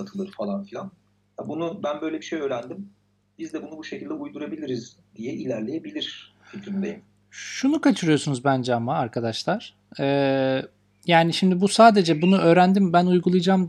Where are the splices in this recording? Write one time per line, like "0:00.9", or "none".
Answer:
none